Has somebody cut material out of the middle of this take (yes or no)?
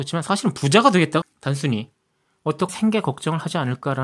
yes